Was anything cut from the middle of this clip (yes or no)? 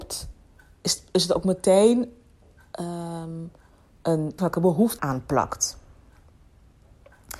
yes